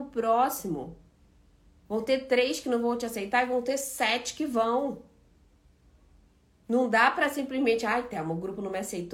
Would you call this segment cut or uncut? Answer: uncut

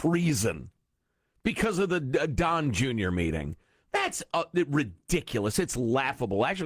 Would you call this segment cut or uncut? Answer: uncut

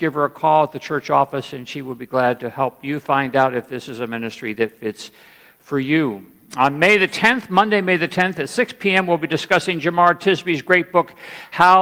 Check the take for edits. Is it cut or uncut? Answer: uncut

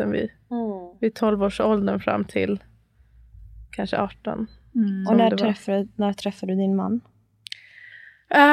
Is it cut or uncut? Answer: uncut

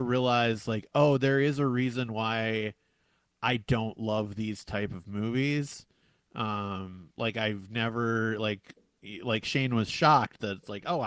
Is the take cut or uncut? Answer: uncut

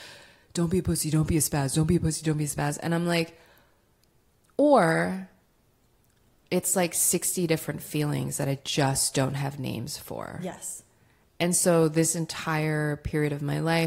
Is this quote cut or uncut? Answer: uncut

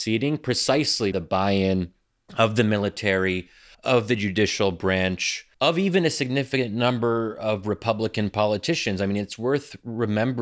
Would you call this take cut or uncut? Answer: cut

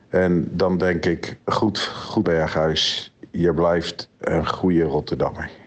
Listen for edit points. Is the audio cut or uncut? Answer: cut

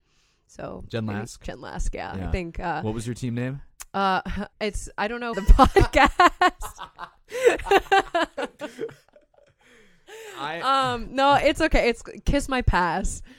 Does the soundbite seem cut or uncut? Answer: cut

